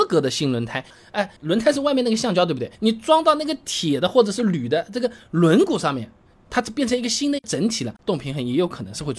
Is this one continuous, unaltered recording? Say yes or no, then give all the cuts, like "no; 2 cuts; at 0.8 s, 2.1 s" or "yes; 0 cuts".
no; 4 cuts; at 1.4 s, 2.8 s, 6.3 s, 8.0 s